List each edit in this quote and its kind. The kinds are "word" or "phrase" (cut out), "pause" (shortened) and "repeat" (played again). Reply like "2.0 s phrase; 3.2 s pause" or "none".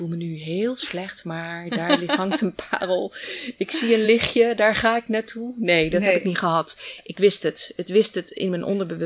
none